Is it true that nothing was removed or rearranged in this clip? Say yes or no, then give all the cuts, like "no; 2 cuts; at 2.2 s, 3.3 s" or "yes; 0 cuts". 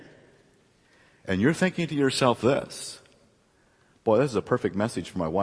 yes; 0 cuts